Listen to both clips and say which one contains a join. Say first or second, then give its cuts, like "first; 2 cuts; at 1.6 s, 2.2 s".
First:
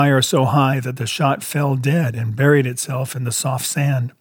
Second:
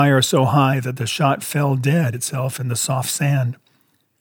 second; 1 cut; at 2.1 s